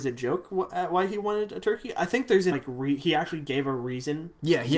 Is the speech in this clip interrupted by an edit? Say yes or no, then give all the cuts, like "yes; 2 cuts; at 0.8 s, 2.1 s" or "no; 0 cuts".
yes; 1 cut; at 2.5 s